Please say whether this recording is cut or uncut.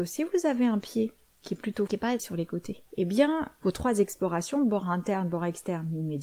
cut